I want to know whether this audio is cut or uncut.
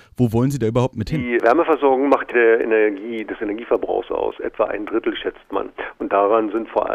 cut